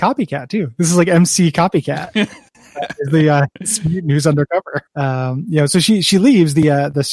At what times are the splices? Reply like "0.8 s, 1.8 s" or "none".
4.9 s